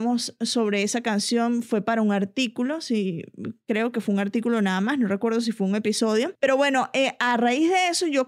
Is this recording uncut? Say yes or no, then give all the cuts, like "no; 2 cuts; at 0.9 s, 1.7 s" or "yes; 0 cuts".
yes; 0 cuts